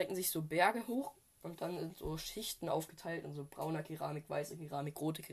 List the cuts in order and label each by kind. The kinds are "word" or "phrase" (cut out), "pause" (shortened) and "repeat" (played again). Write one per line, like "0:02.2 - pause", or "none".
none